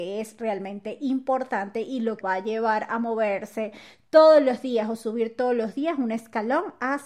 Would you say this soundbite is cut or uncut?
cut